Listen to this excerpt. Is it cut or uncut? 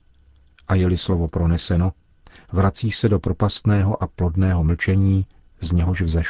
uncut